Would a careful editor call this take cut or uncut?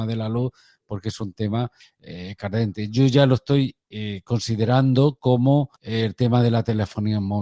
cut